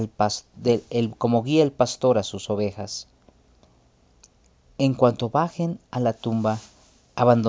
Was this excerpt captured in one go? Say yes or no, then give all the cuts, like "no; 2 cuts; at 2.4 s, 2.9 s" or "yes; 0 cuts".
yes; 0 cuts